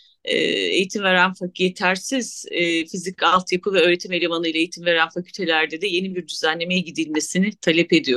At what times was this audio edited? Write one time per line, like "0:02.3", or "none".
none